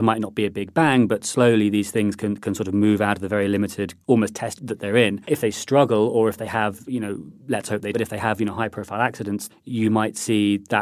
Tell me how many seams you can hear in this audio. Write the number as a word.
six